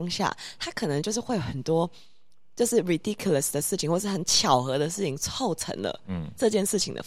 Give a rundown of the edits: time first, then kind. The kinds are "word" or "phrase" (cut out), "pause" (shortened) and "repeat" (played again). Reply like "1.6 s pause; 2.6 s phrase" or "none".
none

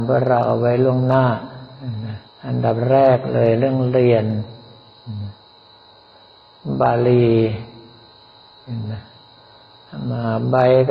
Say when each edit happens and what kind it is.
2.3 s pause

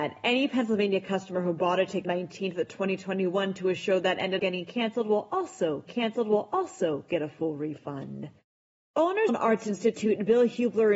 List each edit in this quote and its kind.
2.0 s phrase; 4.4 s word; 5.9 s repeat; 9.3 s phrase

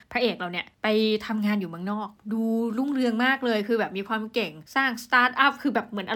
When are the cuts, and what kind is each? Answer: 4.7 s pause

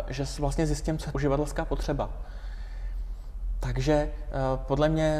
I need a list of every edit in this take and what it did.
1.1 s word

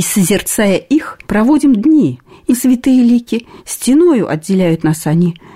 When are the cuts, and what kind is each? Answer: 1.2 s pause; 2.5 s phrase; 3.6 s pause

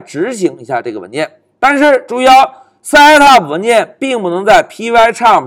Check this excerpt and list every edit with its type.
none

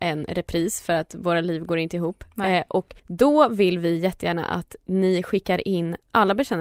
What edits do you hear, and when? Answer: 3.0 s pause

